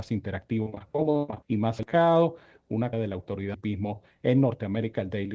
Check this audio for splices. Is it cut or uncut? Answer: cut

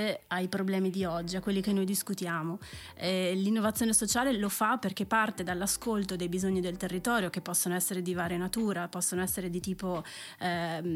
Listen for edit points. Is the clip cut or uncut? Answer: uncut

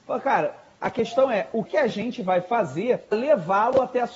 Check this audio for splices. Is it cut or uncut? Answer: cut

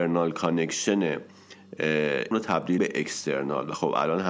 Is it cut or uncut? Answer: cut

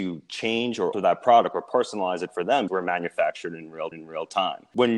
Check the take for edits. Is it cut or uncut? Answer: cut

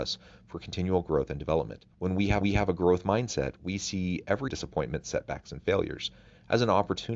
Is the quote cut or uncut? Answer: cut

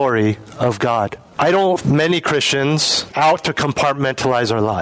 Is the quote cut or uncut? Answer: cut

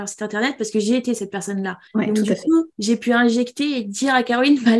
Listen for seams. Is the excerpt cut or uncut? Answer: cut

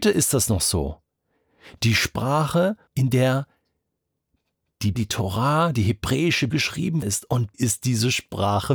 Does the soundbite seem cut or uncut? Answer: cut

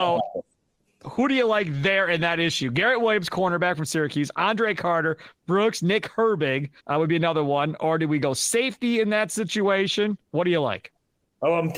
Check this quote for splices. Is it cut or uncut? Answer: cut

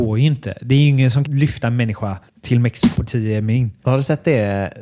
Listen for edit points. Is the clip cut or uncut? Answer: cut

